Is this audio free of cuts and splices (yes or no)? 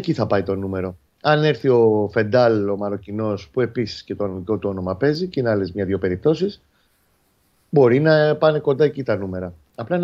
yes